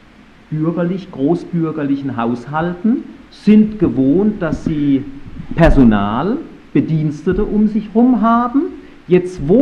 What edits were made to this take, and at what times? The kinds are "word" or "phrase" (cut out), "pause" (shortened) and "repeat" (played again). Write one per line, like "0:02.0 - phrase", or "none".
0:03.3 - pause